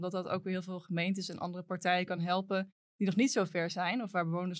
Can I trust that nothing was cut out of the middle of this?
yes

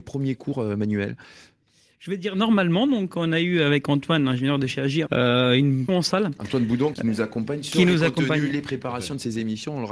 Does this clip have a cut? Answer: yes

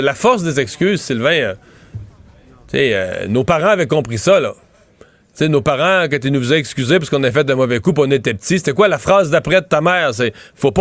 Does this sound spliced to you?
no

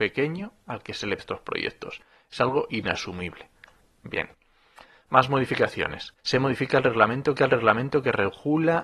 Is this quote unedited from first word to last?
no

